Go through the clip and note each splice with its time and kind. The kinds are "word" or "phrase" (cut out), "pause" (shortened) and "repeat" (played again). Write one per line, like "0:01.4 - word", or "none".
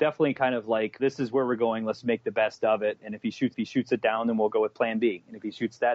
0:01.0 - word
0:03.5 - repeat